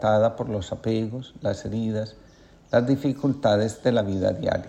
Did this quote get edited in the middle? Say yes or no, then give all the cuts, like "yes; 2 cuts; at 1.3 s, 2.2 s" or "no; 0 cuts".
no; 0 cuts